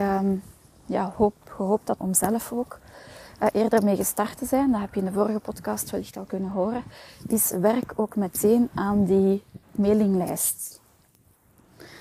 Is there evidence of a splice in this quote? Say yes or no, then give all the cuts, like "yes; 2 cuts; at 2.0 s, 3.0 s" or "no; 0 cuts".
yes; 2 cuts; at 2.0 s, 9.6 s